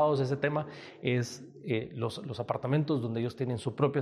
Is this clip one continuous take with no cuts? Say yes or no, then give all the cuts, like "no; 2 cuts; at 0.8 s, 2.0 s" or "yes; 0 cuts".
yes; 0 cuts